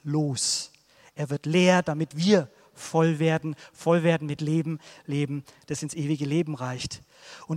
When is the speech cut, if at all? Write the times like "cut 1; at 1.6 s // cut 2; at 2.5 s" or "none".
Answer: none